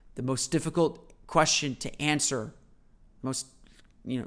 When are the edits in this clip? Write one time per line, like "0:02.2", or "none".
none